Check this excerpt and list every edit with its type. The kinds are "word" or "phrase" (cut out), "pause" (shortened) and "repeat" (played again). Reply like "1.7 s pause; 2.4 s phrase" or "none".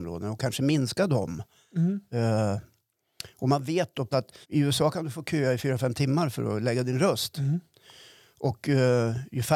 4.1 s word; 4.4 s word